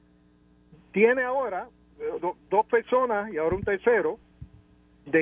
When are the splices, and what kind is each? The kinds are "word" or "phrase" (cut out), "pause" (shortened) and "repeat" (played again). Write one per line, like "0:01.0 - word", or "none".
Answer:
0:02.2 - word